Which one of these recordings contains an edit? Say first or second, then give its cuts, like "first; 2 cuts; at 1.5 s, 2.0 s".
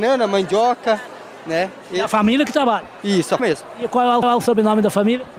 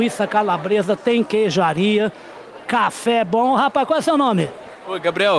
first; 2 cuts; at 3.4 s, 4.2 s